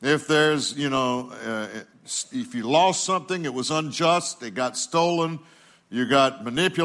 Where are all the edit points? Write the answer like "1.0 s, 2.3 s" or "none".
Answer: none